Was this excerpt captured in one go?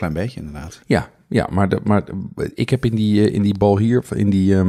yes; 0 cuts

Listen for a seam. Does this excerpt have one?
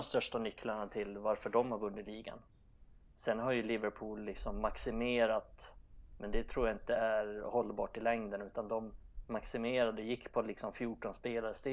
no; 0 cuts

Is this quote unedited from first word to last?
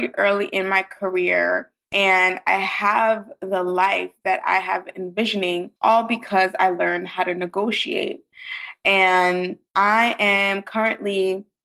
no; 3 cuts; at 1.8 s, 5.8 s, 9.7 s

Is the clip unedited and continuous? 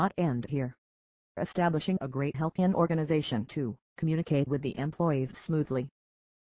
no; 2 cuts; at 2.3 s, 3.8 s

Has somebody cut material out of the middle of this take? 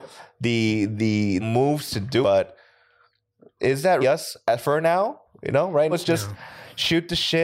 yes; 5 cuts; at 1.4 s, 2.2 s, 4.0 s, 5.3 s, 5.9 s

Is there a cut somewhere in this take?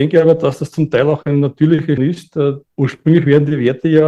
yes; 1 cut; at 2.0 s

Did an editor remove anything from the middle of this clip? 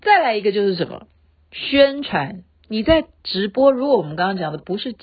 no; 0 cuts

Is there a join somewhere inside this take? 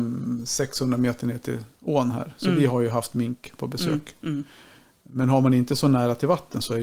no; 0 cuts

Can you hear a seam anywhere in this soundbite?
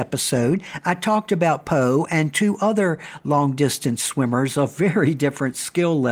no; 0 cuts

